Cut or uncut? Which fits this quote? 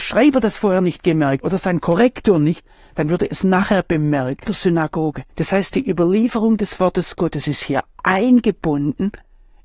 cut